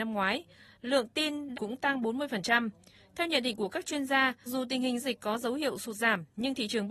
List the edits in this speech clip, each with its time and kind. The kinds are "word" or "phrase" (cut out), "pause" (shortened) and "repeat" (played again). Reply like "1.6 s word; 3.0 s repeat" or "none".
1.5 s phrase; 4.5 s word; 5.0 s word

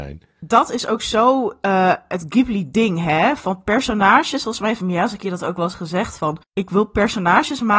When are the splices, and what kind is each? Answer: 6.4 s pause

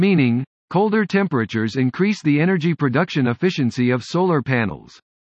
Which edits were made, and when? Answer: none

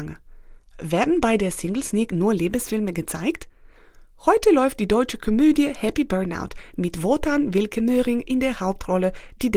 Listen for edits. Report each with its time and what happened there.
none

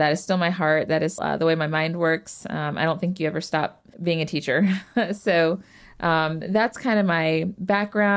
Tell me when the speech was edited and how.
1.2 s word; 3.9 s pause

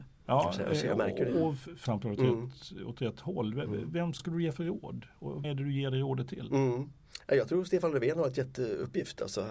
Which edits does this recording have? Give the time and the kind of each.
1.9 s phrase; 4.2 s word; 5.4 s word

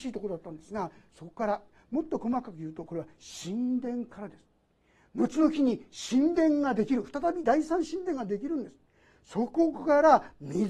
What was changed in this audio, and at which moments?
none

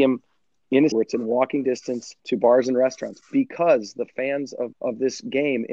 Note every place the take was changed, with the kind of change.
0.9 s word; 2.2 s pause; 4.7 s word

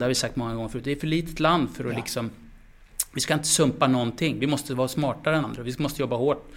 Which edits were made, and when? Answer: 5.4 s word

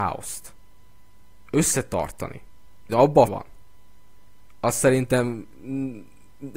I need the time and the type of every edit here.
2.9 s phrase; 3.3 s word

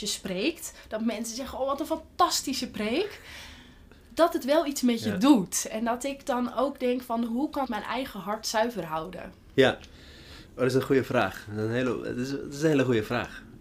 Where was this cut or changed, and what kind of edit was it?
7.6 s word

